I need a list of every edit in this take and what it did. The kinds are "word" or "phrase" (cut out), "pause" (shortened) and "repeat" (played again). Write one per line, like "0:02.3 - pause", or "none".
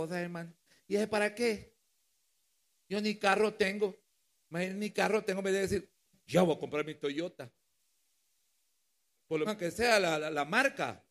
0:01.1 - word
0:09.5 - word